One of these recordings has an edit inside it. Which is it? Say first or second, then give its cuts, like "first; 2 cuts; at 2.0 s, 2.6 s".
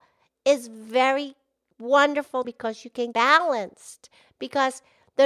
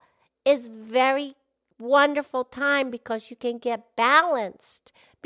first; 2 cuts; at 2.4 s, 3.1 s